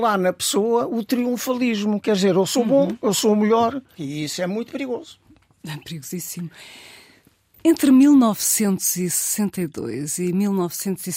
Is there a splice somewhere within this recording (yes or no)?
no